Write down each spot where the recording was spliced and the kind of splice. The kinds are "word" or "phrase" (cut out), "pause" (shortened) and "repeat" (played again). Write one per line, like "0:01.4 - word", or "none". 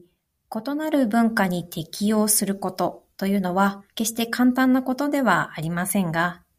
0:03.9 - pause